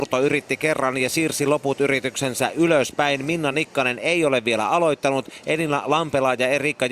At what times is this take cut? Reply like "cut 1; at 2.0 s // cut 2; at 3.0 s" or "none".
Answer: none